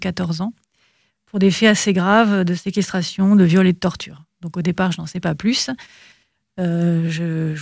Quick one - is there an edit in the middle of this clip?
no; 0 cuts

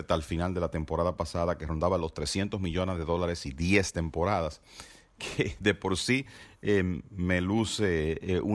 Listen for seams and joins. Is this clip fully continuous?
yes; 0 cuts

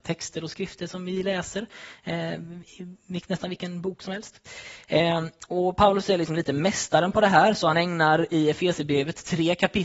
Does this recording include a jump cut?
no; 0 cuts

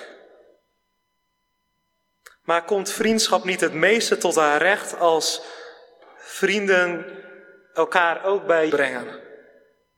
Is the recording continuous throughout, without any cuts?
no; 1 cut; at 8.7 s

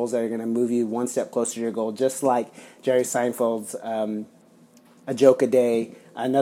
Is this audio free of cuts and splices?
yes; 0 cuts

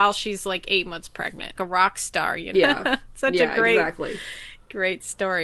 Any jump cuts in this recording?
yes; 2 cuts; at 1.5 s, 2.5 s

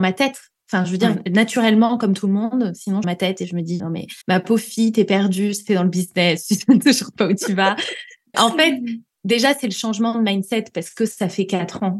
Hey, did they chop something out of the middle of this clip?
yes; 5 cuts; at 3.0 s, 3.8 s, 4.2 s, 5.7 s, 8.3 s

